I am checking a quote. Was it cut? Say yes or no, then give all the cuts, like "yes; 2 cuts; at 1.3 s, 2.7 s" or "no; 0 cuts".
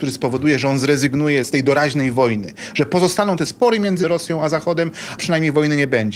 yes; 2 cuts; at 3.5 s, 5.2 s